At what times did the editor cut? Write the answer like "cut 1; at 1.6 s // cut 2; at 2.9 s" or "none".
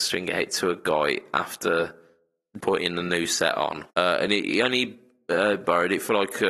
cut 1; at 2.6 s // cut 2; at 3.9 s